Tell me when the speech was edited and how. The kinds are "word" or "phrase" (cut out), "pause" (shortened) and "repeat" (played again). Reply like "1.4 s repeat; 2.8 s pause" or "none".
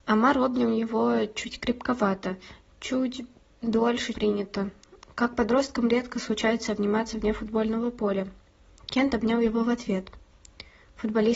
4.1 s word